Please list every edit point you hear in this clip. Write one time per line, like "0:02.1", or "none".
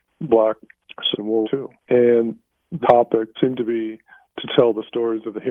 0:01.1
0:01.4
0:02.8
0:03.3